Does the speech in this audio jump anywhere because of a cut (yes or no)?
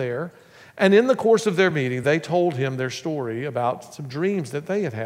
no